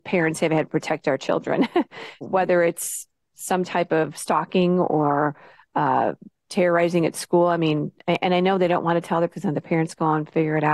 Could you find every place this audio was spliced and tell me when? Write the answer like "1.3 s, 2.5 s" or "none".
2.2 s, 9.3 s